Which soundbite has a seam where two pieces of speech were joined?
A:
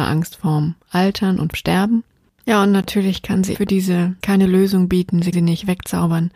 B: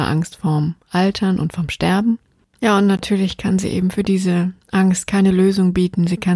A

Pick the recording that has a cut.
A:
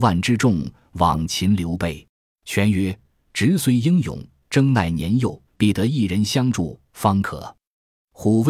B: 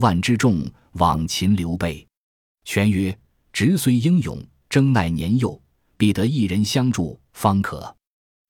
A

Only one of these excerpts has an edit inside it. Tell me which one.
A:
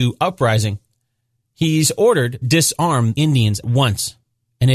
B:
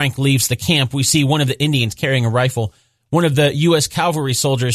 A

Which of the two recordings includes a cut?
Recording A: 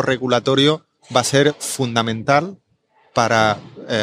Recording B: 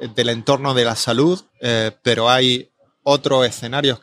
B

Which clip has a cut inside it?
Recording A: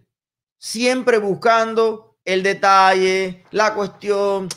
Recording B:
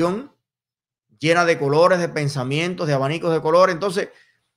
A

